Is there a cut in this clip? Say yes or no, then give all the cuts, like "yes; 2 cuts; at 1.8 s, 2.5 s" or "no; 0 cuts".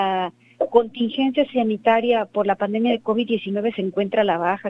no; 0 cuts